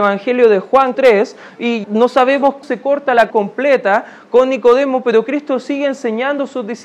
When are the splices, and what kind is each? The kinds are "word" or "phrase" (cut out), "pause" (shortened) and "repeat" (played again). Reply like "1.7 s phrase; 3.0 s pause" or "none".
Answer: 0.9 s word; 1.8 s word; 2.6 s word; 3.3 s word